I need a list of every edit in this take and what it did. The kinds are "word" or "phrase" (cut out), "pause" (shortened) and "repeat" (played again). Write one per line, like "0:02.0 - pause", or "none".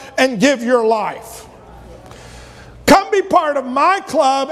none